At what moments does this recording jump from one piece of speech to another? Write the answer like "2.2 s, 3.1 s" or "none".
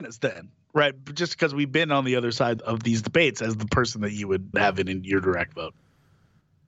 2.6 s, 4.5 s